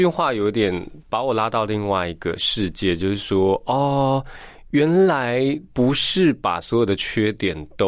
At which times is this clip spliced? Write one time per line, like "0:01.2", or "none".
none